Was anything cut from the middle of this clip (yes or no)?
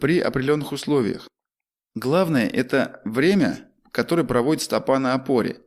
no